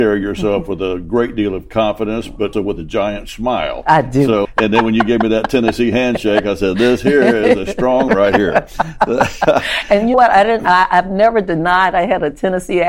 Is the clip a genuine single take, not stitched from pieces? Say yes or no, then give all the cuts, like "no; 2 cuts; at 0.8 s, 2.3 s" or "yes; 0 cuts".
no; 4 cuts; at 2.5 s, 4.4 s, 8.1 s, 10.1 s